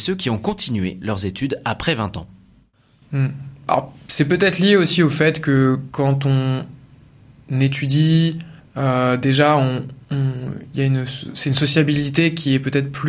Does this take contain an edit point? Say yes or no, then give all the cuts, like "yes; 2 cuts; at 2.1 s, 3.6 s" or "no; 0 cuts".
yes; 2 cuts; at 8.6 s, 10.0 s